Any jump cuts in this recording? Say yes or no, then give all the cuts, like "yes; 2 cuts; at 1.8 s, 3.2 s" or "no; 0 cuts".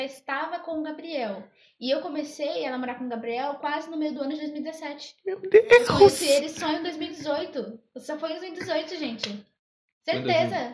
no; 0 cuts